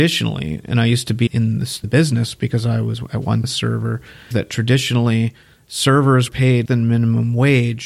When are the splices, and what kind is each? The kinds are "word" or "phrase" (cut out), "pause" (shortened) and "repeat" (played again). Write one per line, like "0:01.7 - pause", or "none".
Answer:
0:01.3 - word
0:01.8 - word
0:03.4 - word
0:04.3 - word
0:06.3 - word
0:06.6 - word

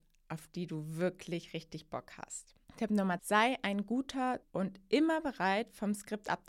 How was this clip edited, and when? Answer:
0:02.6 - pause
0:03.2 - word
0:04.4 - word

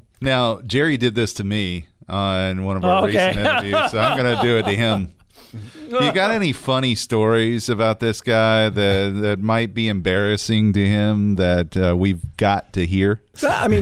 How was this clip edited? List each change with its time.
none

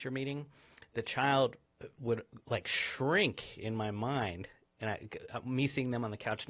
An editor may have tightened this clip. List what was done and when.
none

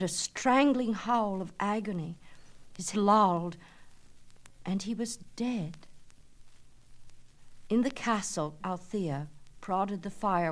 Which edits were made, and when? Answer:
0:02.9 - word
0:08.6 - word

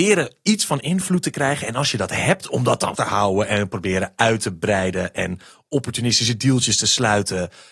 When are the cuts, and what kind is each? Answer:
0:02.9 - word

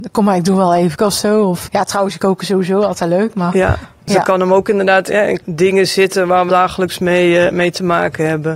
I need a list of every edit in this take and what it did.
0:01.0 - word
0:01.7 - word
0:02.2 - word
0:05.4 - word
0:06.5 - word

